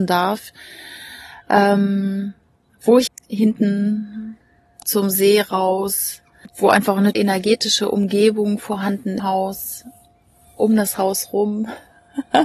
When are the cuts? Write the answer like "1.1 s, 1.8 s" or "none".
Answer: 1.4 s, 3.1 s, 4.8 s, 6.5 s, 7.1 s, 9.2 s